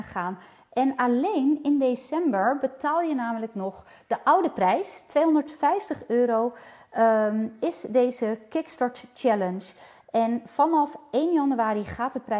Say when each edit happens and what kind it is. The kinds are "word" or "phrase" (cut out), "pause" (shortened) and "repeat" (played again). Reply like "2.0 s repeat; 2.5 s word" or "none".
none